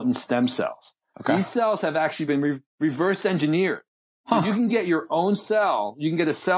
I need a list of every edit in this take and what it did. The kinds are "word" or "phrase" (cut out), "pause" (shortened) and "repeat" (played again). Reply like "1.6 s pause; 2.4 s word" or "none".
none